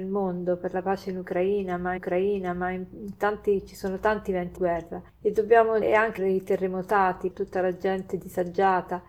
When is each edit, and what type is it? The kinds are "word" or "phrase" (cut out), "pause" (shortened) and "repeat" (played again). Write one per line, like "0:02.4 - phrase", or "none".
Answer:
0:02.0 - repeat
0:04.6 - word
0:05.1 - pause
0:05.8 - word
0:06.2 - word
0:07.3 - word